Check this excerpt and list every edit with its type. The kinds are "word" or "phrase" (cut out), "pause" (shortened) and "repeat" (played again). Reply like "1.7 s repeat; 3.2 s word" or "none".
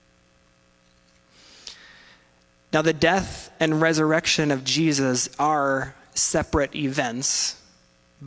none